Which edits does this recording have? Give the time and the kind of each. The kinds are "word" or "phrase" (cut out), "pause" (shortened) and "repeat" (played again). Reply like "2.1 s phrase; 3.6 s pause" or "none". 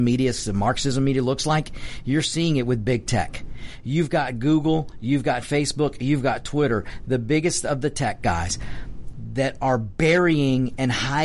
none